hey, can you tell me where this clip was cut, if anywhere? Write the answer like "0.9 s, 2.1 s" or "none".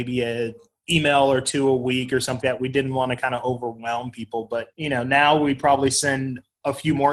2.4 s, 4.7 s